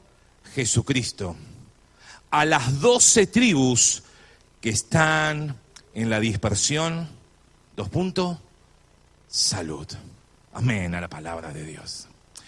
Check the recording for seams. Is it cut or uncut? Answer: uncut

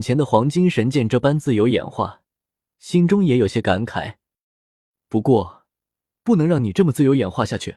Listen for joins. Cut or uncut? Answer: uncut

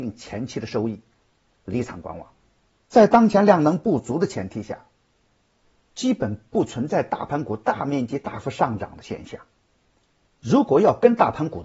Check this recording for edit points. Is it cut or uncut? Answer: uncut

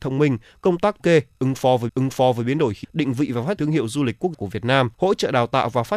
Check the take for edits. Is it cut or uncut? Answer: cut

